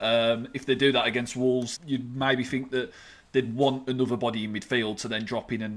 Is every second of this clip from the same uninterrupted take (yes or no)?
no